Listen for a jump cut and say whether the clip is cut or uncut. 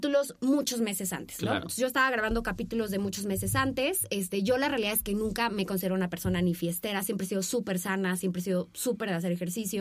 uncut